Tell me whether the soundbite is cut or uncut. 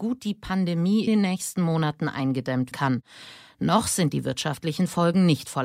cut